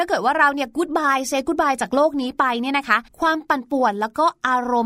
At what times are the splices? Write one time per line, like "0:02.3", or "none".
0:03.1

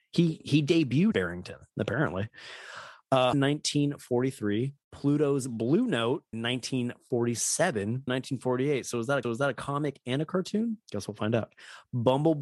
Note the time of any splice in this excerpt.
0:01.1
0:01.7
0:03.3
0:04.8
0:06.3
0:08.1
0:09.2
0:10.8

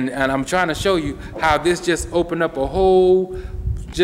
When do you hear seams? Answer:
none

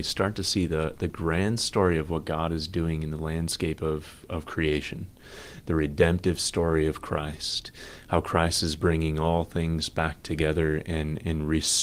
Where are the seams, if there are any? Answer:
none

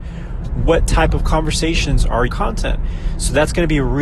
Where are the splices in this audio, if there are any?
0:02.3

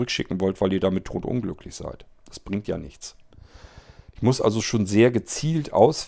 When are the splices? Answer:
none

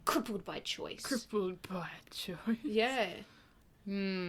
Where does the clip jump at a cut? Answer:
none

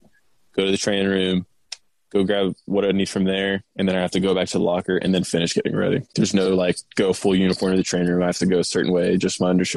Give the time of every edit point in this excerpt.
none

